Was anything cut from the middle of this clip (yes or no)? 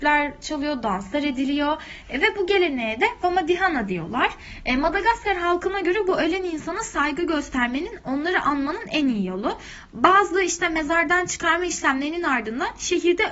no